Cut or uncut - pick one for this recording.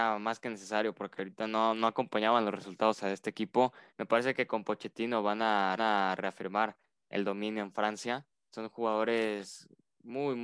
cut